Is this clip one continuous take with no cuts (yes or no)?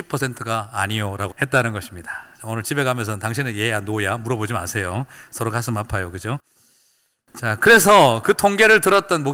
no